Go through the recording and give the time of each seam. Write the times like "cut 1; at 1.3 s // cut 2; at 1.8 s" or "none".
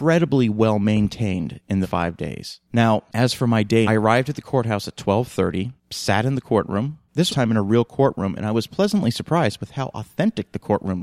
cut 1; at 1.8 s // cut 2; at 3.9 s // cut 3; at 7.3 s

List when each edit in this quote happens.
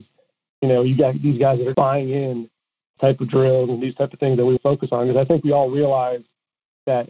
cut 1; at 1.7 s // cut 2; at 3.0 s // cut 3; at 4.6 s

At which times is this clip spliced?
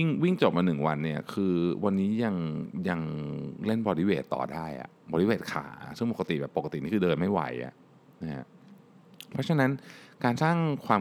none

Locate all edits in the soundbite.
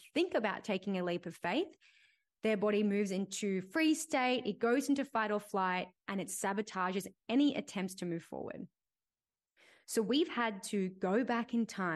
none

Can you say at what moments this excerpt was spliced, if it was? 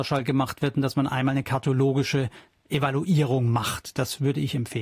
none

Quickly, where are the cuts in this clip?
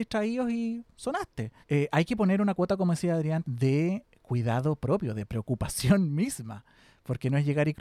cut 1; at 1.6 s // cut 2; at 3.4 s

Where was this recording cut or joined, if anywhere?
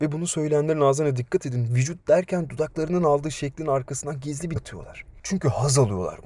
cut 1; at 4.6 s

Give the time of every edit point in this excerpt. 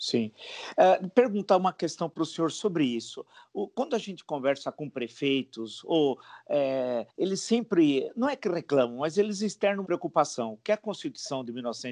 cut 1; at 7.1 s // cut 2; at 9.8 s

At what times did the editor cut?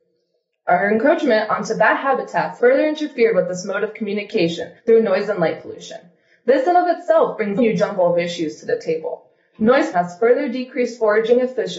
cut 1; at 2.6 s // cut 2; at 4.8 s // cut 3; at 7.6 s // cut 4; at 9.9 s

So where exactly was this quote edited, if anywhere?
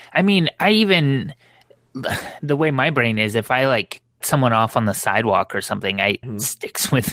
cut 1; at 4.2 s // cut 2; at 6.2 s

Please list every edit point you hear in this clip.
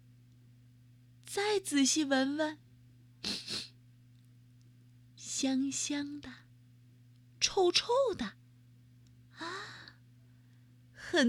none

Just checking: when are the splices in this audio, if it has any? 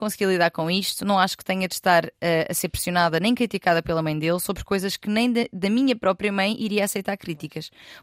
none

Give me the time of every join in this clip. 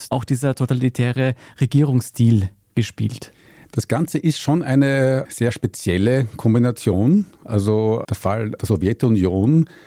none

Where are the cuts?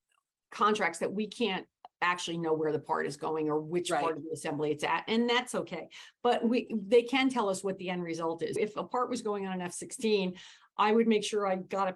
cut 1; at 8.6 s

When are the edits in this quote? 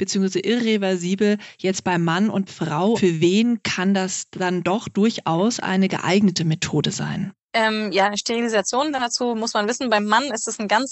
cut 1; at 2.5 s // cut 2; at 2.9 s // cut 3; at 7.4 s

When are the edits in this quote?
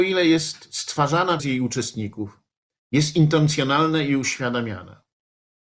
cut 1; at 1.4 s

